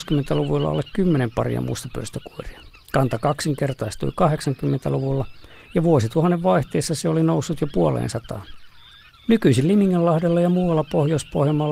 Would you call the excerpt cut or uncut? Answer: uncut